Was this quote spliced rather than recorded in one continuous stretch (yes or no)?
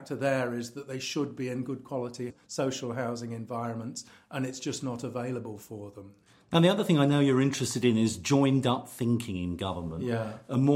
no